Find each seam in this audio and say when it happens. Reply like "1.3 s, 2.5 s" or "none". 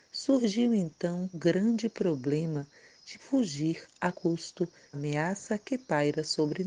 1.3 s, 3.2 s, 4.1 s, 4.9 s